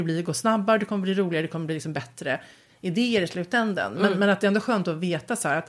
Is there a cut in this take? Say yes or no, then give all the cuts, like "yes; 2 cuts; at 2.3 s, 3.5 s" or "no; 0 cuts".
no; 0 cuts